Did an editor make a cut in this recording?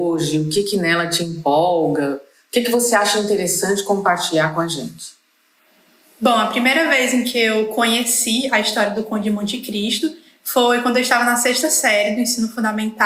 no; 0 cuts

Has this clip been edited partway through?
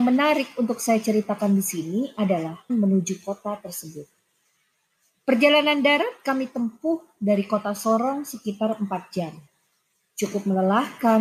yes; 1 cut; at 2.7 s

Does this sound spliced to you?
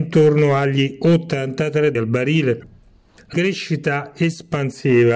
yes; 2 cuts; at 2.0 s, 3.3 s

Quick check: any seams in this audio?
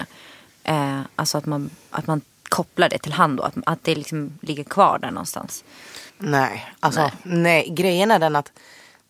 yes; 1 cut; at 6.1 s

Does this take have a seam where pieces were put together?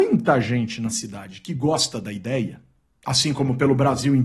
no; 0 cuts

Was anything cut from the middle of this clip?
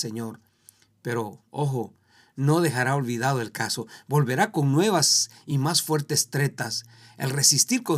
no; 0 cuts

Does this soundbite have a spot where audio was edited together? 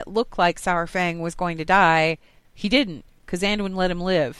no; 0 cuts

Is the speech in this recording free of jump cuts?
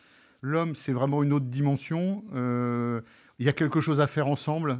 yes; 0 cuts

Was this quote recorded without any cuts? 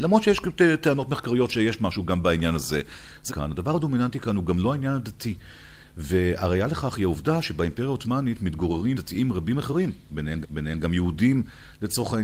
no; 3 cuts; at 3.3 s, 8.9 s, 10.4 s

